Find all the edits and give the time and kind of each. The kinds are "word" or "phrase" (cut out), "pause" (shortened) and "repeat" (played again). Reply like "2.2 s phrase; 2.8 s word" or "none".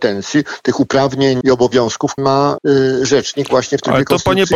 1.4 s word; 2.2 s word; 2.6 s word